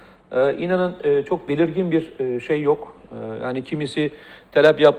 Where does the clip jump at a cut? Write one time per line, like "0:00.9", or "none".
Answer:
none